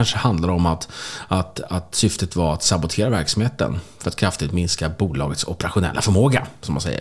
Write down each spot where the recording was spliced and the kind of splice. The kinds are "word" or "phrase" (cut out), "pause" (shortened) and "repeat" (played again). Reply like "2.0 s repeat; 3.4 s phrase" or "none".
none